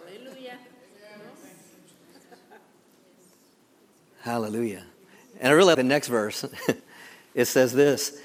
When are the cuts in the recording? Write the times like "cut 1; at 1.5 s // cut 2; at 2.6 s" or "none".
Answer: cut 1; at 4.9 s // cut 2; at 5.7 s // cut 3; at 6.8 s